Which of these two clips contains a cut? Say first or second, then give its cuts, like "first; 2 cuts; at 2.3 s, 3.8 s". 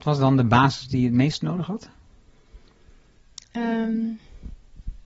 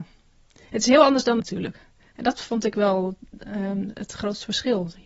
second; 1 cut; at 1.4 s